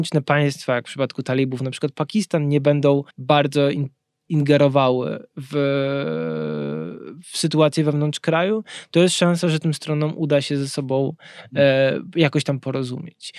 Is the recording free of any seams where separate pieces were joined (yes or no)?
no